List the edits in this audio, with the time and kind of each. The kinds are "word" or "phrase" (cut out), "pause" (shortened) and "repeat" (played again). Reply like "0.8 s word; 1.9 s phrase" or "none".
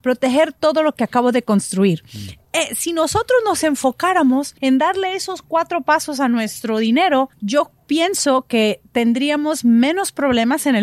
4.6 s pause; 7.3 s pause